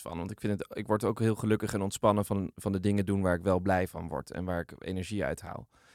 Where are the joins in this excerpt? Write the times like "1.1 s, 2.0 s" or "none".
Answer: none